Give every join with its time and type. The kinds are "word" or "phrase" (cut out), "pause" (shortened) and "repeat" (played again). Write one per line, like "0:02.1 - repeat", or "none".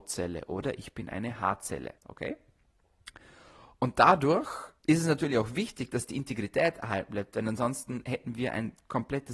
0:02.0 - pause
0:04.8 - pause